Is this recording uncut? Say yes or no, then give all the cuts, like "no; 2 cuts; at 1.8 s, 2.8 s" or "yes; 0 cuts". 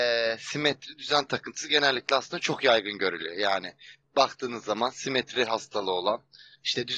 yes; 0 cuts